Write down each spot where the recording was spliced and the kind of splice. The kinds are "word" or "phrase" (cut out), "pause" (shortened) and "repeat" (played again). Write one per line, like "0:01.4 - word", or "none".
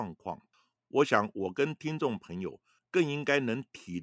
none